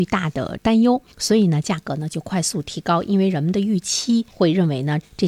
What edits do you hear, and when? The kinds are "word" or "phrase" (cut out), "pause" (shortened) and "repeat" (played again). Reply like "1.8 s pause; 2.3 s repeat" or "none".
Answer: 1.1 s pause; 4.3 s pause